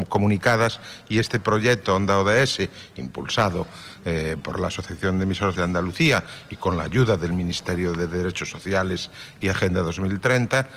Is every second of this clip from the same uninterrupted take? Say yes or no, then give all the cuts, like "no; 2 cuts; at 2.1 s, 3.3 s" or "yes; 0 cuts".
no; 1 cut; at 5.5 s